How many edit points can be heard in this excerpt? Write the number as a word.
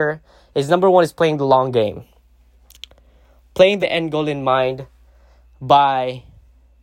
one